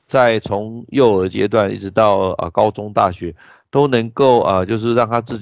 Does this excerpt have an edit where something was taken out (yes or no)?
no